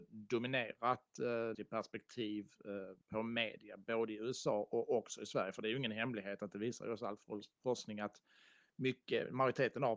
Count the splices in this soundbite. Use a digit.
2